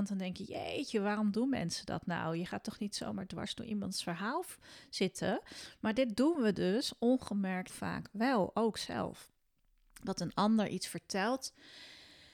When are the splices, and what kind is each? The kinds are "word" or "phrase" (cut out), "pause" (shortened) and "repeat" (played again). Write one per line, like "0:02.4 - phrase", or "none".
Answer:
0:07.7 - word